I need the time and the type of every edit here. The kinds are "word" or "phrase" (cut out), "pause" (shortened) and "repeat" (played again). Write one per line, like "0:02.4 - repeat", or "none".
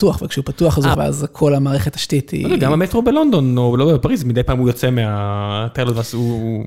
0:00.9 - phrase